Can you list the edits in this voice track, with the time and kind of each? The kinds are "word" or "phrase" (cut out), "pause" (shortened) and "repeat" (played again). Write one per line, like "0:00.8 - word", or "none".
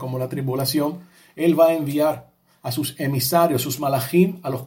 none